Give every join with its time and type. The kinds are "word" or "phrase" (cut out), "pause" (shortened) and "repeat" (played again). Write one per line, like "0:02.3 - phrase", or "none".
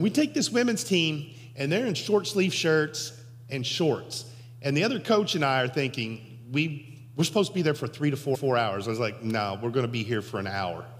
0:08.3 - repeat